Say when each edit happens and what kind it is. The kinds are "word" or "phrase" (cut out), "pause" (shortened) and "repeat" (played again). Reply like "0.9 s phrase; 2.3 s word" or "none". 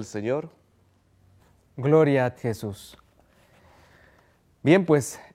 2.3 s phrase